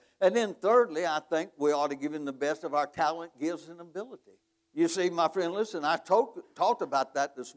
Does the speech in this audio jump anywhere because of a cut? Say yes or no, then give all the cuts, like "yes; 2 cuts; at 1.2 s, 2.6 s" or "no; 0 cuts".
yes; 1 cut; at 4.5 s